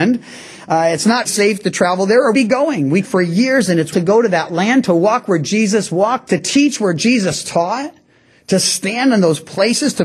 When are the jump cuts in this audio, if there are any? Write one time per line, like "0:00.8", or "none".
0:01.2
0:02.3
0:03.0
0:03.9
0:06.2